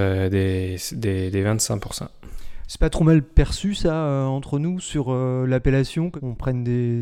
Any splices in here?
no; 0 cuts

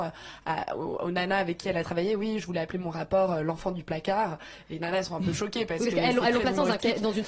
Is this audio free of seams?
yes; 0 cuts

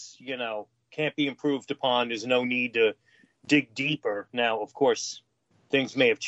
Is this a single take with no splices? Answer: yes; 0 cuts

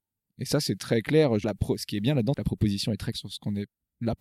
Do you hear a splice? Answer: yes; 3 cuts; at 1.4 s, 2.3 s, 3.1 s

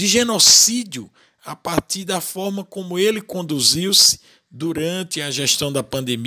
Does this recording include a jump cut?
no; 0 cuts

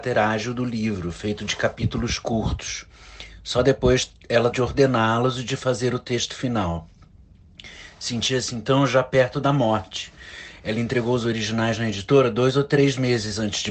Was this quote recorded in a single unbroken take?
no; 1 cut; at 4.5 s

